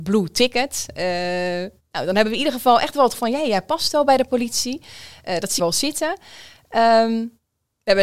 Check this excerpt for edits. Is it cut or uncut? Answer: cut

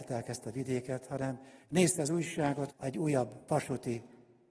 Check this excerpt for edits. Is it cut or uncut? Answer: cut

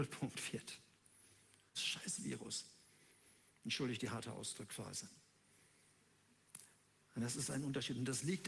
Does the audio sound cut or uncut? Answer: cut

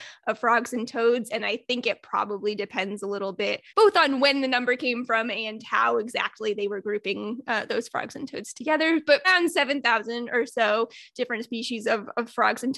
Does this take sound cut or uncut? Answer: cut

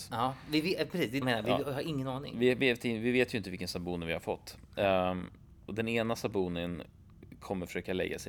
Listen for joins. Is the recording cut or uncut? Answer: cut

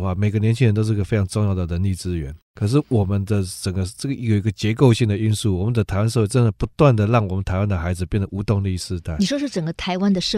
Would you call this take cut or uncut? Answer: cut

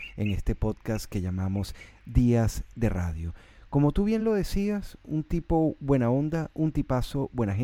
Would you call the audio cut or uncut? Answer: uncut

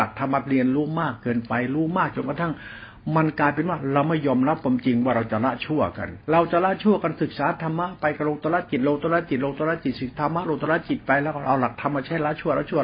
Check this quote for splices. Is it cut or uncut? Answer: cut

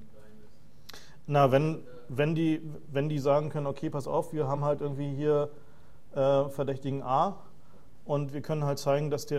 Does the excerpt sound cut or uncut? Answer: uncut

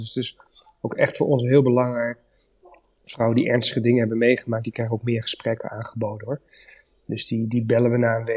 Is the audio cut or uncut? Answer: uncut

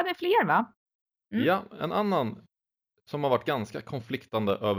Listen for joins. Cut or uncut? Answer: uncut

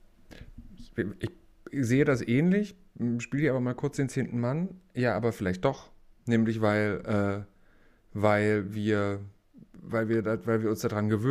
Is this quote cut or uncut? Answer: uncut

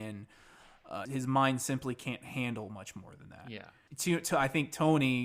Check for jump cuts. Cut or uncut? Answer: cut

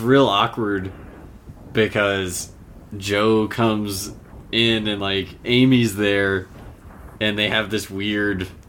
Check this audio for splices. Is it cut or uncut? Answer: uncut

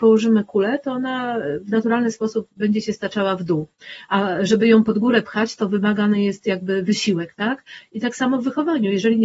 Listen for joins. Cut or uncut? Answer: uncut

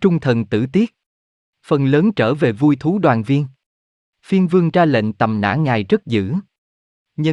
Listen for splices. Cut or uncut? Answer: uncut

